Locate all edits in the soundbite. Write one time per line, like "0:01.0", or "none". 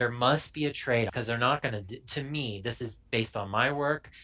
0:01.1